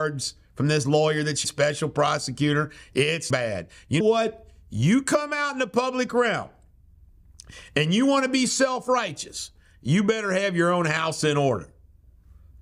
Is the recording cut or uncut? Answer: cut